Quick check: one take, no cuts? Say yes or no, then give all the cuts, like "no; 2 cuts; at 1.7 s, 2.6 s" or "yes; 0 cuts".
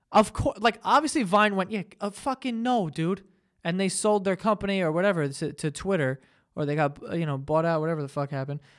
yes; 0 cuts